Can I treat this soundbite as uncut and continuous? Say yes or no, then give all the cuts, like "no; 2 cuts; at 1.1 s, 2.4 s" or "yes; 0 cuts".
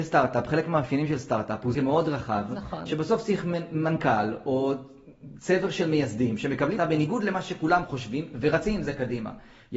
no; 2 cuts; at 1.7 s, 6.8 s